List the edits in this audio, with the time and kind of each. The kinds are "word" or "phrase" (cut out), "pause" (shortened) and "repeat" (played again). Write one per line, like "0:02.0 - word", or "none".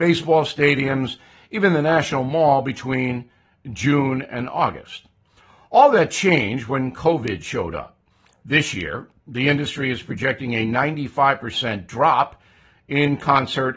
none